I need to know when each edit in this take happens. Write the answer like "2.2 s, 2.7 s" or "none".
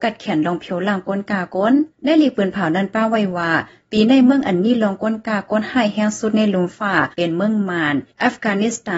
1.9 s, 7.1 s